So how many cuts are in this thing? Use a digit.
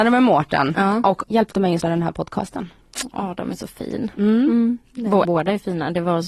3